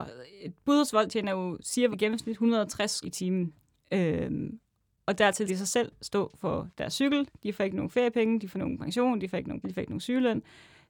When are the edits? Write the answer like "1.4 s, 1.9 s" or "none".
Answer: 1.9 s, 3.0 s, 5.5 s, 8.5 s, 9.6 s